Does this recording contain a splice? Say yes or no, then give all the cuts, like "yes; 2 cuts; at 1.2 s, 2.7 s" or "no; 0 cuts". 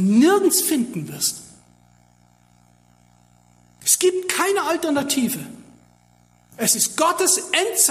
no; 0 cuts